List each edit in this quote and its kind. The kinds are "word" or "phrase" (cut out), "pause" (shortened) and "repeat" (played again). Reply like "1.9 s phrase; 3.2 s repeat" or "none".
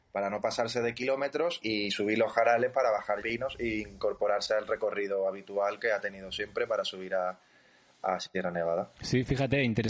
1.6 s word; 3.2 s word